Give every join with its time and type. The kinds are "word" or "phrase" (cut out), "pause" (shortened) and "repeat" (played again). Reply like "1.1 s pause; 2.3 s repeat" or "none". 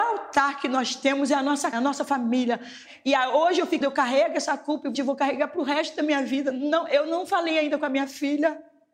1.7 s word; 3.8 s word; 4.9 s word